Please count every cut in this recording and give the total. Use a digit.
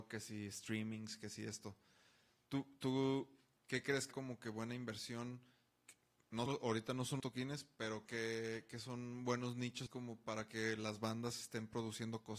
6